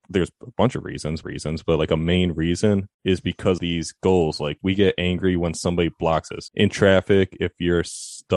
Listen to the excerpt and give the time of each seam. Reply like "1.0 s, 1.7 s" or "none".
1.2 s, 2.9 s, 3.6 s, 6.5 s